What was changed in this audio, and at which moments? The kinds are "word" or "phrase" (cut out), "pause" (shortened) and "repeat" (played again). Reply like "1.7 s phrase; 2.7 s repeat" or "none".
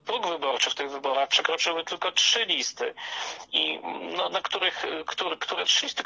none